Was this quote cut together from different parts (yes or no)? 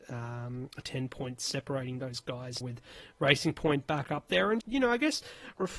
yes